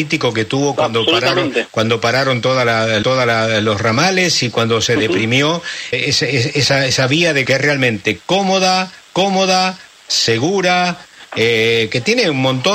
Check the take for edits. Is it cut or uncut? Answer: cut